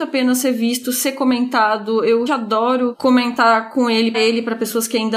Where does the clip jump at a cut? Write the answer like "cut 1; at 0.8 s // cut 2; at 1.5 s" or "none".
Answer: cut 1; at 2.3 s // cut 2; at 4.1 s